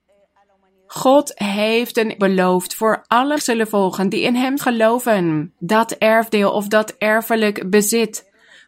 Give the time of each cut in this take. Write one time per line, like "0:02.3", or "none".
0:02.2
0:03.4
0:04.6
0:05.6